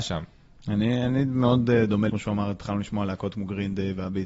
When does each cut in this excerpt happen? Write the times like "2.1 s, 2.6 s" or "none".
2.1 s

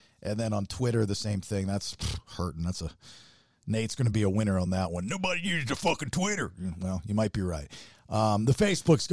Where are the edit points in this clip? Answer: none

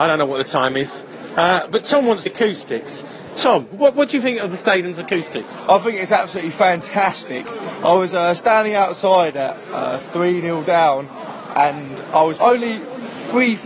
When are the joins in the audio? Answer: 2.3 s, 12.4 s

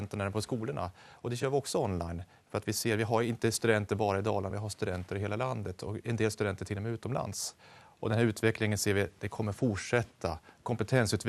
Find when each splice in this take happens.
none

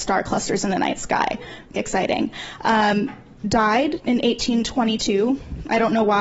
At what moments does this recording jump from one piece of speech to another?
1.8 s, 3.4 s

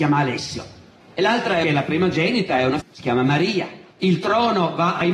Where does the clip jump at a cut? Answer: 1.0 s, 1.6 s, 2.8 s, 3.9 s

